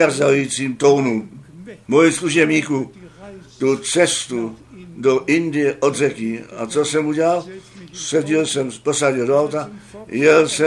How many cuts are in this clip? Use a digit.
1